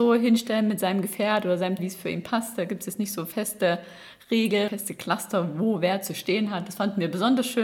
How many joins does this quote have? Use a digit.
2